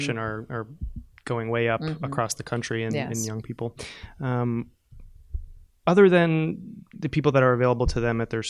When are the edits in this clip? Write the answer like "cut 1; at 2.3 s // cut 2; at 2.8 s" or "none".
cut 1; at 5.7 s